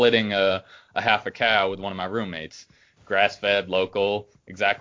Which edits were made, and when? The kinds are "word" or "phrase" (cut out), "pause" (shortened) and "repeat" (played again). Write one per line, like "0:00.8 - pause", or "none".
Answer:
none